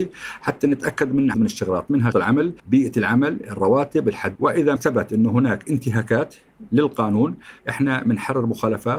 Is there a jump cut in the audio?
yes; 6 cuts; at 1.3 s, 2.1 s, 2.6 s, 4.4 s, 4.8 s, 7.6 s

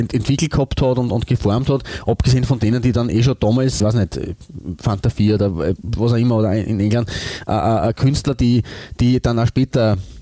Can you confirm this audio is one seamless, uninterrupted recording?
no; 1 cut; at 3.8 s

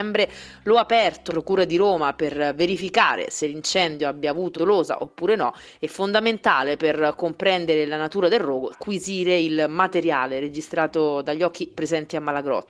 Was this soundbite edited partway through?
yes; 4 cuts; at 1.3 s, 4.5 s, 8.7 s, 11.7 s

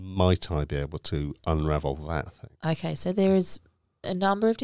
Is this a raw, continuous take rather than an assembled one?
no; 1 cut; at 2.5 s

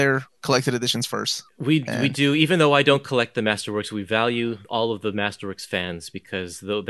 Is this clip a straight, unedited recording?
no; 1 cut; at 4.6 s

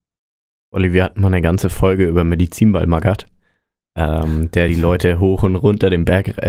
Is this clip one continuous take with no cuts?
yes; 0 cuts

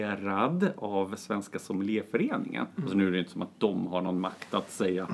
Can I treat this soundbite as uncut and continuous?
yes; 0 cuts

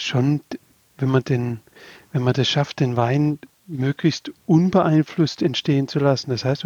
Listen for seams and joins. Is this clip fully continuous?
yes; 0 cuts

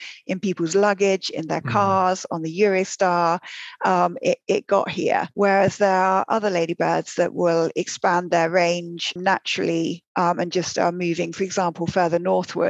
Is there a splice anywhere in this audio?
yes; 1 cut; at 9.2 s

